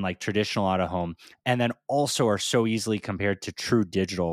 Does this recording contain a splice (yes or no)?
no